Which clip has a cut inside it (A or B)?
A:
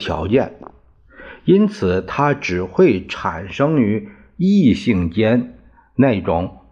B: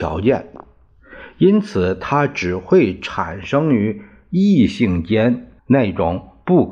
B